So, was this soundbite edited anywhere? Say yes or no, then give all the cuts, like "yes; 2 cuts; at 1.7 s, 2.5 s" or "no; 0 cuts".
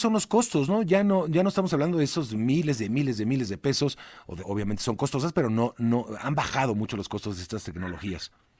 yes; 1 cut; at 4.4 s